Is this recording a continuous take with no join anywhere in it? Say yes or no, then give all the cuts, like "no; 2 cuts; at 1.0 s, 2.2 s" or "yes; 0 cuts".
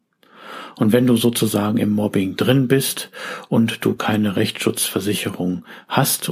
yes; 0 cuts